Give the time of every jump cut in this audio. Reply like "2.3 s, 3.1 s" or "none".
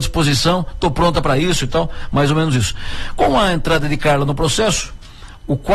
none

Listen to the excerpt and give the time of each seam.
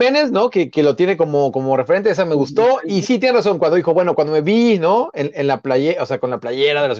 none

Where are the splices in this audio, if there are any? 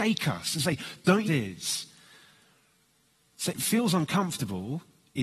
1.3 s, 3.5 s

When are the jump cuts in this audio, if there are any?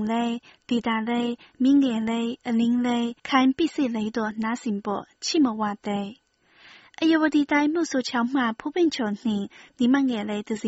3.2 s

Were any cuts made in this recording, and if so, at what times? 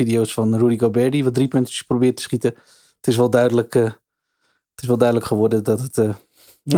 none

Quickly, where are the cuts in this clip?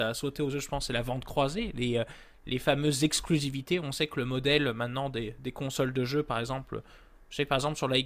none

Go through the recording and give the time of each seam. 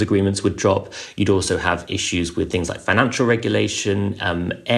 none

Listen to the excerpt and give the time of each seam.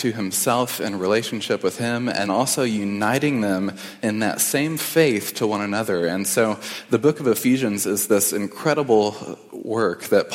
2.3 s

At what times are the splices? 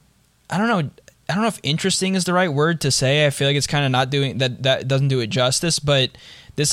none

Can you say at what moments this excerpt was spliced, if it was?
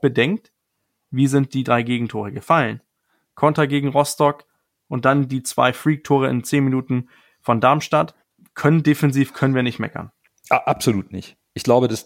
none

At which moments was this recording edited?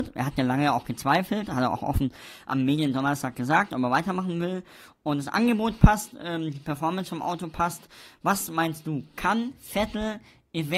none

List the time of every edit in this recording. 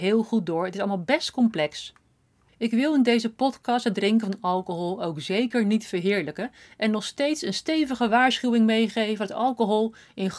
none

